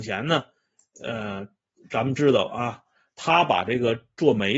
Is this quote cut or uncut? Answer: uncut